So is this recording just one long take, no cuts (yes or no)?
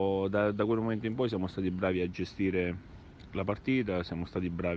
yes